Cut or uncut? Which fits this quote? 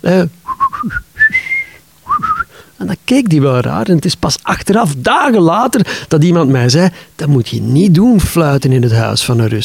uncut